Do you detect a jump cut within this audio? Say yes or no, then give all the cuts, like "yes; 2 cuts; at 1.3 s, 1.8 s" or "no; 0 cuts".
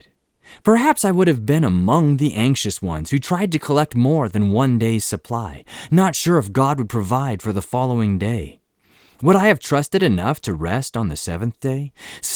no; 0 cuts